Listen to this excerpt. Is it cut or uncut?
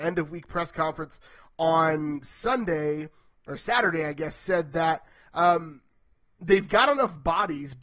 uncut